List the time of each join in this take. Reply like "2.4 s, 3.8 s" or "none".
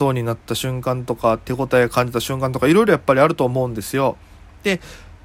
none